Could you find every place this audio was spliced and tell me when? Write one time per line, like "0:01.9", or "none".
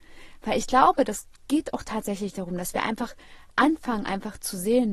none